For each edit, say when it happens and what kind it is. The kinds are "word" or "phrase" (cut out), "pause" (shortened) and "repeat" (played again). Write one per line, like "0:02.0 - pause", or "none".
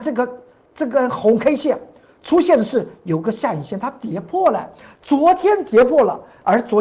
none